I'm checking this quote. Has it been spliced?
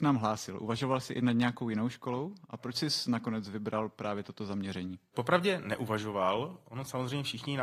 no; 0 cuts

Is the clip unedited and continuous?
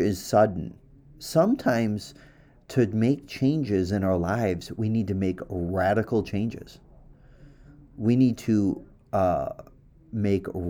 yes; 0 cuts

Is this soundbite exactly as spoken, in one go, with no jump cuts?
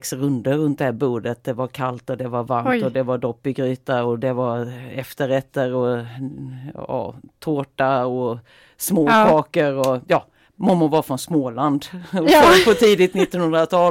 yes; 0 cuts

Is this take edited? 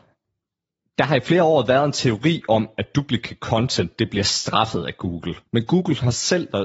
yes; 1 cut; at 5.5 s

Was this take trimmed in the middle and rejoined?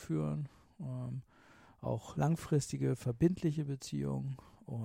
yes; 1 cut; at 2.1 s

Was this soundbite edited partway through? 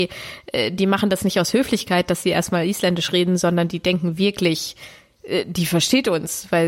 no; 0 cuts

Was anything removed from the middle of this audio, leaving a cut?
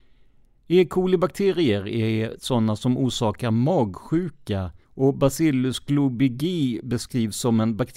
yes; 1 cut; at 4.8 s

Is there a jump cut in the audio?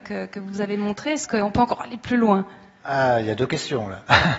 no; 0 cuts

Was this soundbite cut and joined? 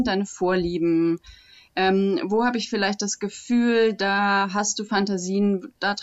no; 0 cuts

